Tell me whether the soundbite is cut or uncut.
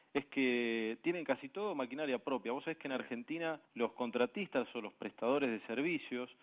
cut